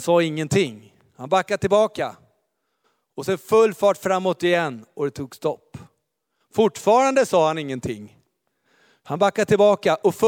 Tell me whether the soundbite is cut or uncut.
uncut